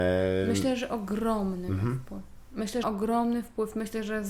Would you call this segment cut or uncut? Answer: cut